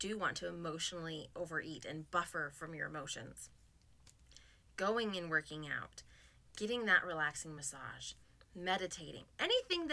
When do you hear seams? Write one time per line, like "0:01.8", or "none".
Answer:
none